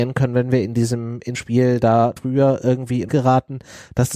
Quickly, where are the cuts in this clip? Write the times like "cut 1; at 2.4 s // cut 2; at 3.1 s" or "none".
cut 1; at 1.3 s // cut 2; at 2.2 s // cut 3; at 3.1 s